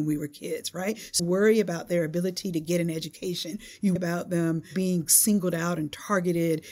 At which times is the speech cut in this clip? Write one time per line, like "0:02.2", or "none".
0:01.2
0:04.0

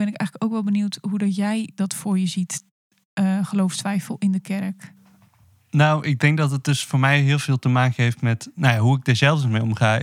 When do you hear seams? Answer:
none

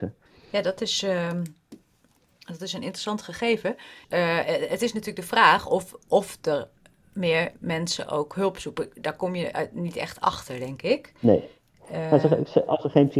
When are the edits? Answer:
none

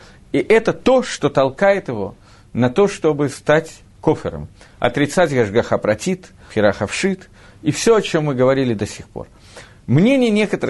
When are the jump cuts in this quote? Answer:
0:06.5

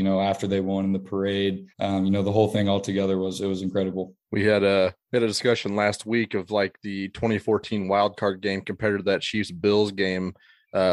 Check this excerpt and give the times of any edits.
0:01.7
0:04.2
0:05.0

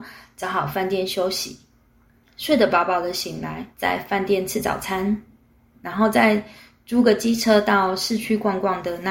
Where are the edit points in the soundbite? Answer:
0:03.7

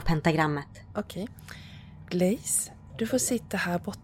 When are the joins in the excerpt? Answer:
none

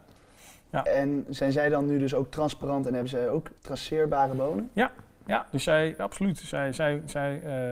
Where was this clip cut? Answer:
0:03.6

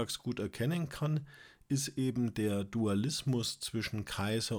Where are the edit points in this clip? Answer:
none

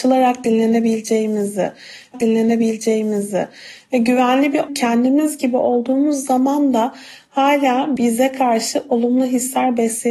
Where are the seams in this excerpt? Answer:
0:02.1
0:04.7
0:08.0

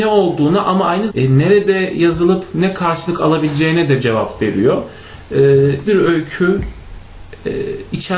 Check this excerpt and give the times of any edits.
0:01.1
0:04.0
0:05.9

